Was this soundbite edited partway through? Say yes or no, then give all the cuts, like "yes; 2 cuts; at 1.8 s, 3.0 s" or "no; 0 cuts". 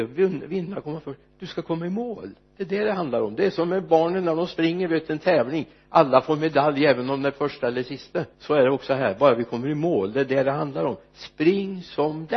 yes; 1 cut; at 8.3 s